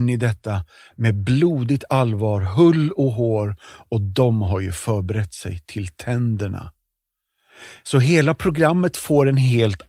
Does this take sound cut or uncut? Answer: uncut